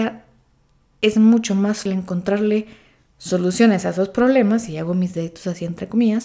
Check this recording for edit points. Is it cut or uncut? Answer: cut